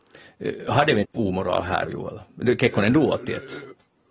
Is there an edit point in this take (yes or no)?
yes